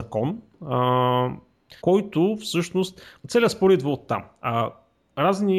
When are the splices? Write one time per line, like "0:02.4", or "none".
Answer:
0:01.8
0:03.2